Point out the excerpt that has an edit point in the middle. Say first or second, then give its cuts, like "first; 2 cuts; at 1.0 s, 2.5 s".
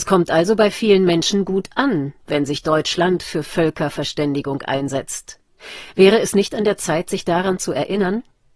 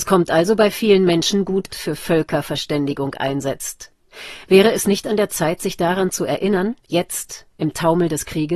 second; 2 cuts; at 1.7 s, 6.8 s